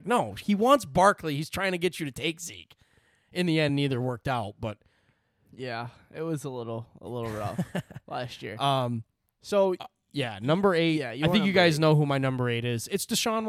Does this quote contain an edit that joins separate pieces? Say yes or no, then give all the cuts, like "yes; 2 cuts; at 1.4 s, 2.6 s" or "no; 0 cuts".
no; 0 cuts